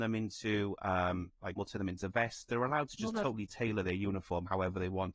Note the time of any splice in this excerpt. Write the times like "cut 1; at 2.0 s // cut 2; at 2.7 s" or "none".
cut 1; at 1.6 s